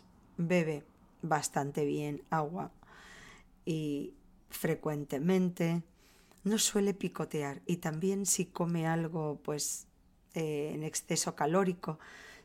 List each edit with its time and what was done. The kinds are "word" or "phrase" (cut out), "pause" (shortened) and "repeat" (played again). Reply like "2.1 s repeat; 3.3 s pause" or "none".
none